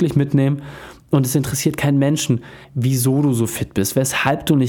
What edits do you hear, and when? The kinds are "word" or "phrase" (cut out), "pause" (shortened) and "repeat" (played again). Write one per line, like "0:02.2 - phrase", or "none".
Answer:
0:02.6 - pause